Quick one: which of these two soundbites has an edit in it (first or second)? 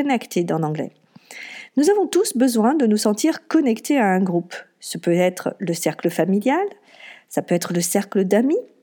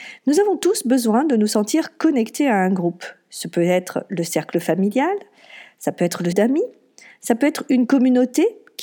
second